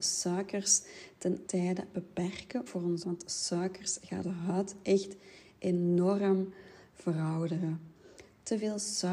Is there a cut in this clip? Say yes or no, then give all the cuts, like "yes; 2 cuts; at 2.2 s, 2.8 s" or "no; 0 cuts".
yes; 4 cuts; at 1.5 s, 2.7 s, 3.0 s, 4.2 s